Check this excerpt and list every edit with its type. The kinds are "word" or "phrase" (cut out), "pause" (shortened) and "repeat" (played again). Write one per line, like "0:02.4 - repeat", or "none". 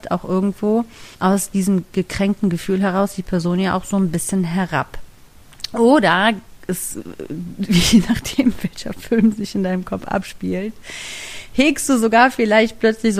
0:01.1 - pause
0:08.6 - word